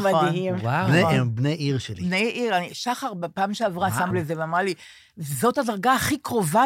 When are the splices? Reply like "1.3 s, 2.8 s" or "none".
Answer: 4.1 s